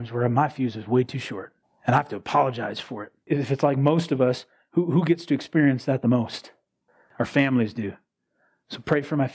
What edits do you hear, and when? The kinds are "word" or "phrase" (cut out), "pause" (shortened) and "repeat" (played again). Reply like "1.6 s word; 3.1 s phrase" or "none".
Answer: 1.6 s pause; 3.2 s pause